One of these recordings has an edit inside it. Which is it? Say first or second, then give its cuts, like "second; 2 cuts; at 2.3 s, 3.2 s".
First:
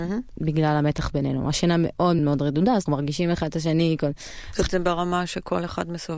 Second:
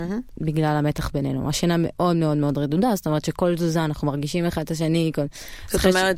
first; 3 cuts; at 2.2 s, 2.9 s, 4.7 s